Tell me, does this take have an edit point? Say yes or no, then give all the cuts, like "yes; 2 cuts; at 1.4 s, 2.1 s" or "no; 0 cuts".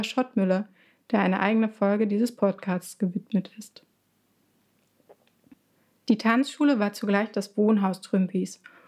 no; 0 cuts